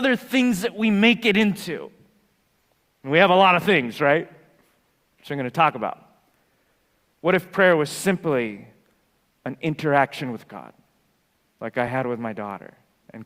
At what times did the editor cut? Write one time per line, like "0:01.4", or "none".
none

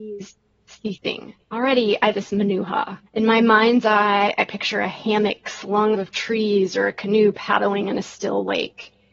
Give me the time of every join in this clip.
0:01.4
0:02.1
0:03.1
0:05.9

